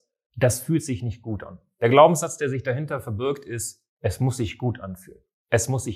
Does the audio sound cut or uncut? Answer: uncut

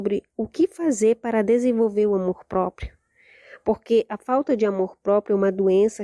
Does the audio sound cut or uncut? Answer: uncut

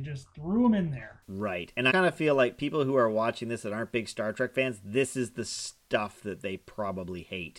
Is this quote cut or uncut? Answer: cut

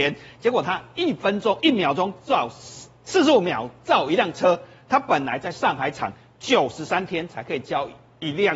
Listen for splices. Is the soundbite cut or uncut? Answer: uncut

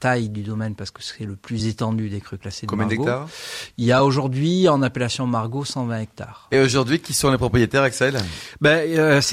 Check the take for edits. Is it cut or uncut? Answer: uncut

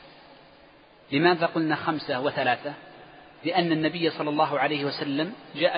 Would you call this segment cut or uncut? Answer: uncut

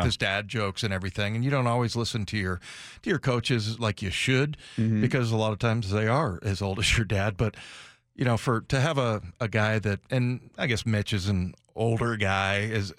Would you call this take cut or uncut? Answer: uncut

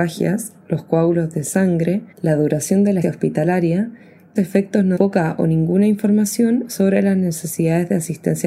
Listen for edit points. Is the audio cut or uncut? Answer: cut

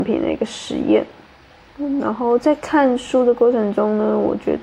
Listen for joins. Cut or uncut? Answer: uncut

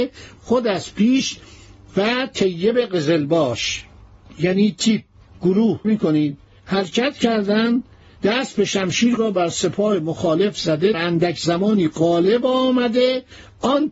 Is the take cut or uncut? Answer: cut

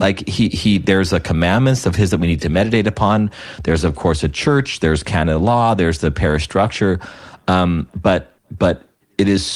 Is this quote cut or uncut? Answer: cut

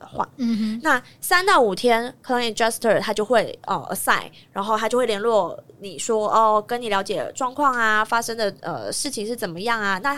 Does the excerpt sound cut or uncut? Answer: uncut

